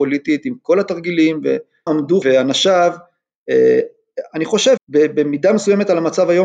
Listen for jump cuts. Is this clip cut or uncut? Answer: cut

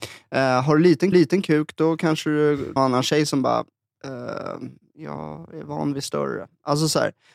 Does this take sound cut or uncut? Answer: cut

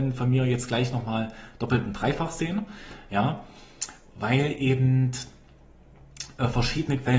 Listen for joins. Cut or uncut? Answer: uncut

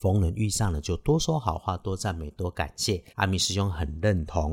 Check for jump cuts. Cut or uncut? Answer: cut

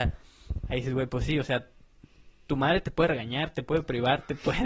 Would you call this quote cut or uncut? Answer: uncut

